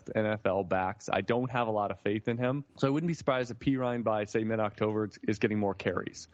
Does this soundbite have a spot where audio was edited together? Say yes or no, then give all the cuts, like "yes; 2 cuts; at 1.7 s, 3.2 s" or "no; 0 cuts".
yes; 1 cut; at 2.7 s